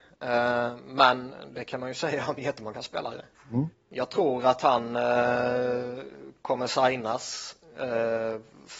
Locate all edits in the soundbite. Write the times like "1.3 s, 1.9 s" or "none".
3.3 s